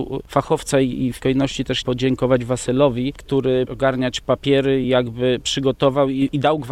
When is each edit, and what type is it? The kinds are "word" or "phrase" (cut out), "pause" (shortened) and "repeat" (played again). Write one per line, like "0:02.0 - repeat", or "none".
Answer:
0:01.2 - word
0:01.8 - word
0:03.7 - word
0:04.8 - word

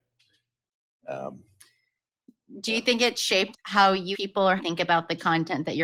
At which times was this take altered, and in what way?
0:03.5 - phrase
0:04.1 - word
0:04.6 - phrase

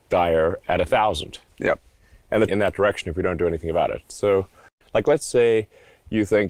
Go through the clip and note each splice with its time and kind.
0:02.5 - phrase

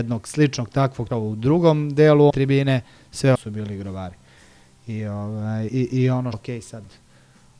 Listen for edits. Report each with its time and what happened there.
0:01.1 - word
0:02.3 - word
0:03.3 - word
0:05.7 - word
0:06.3 - word

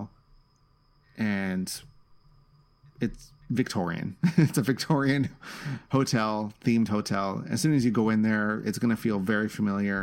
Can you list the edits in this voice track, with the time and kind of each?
0:03.4 - pause

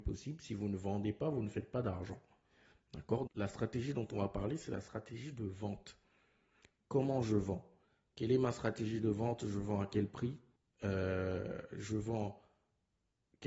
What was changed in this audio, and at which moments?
0:03.3 - word
0:10.6 - pause

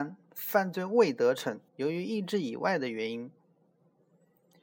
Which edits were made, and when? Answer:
0:01.7 - pause

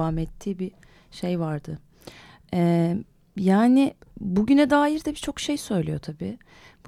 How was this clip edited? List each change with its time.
none

